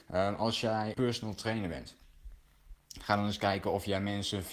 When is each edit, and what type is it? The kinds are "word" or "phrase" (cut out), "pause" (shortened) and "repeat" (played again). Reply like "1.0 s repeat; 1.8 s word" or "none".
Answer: 0.9 s word